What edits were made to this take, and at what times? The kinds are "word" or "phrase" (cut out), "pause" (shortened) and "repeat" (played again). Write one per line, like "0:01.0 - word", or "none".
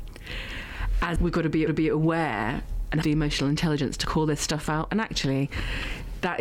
0:01.2 - word
0:01.7 - repeat
0:03.0 - word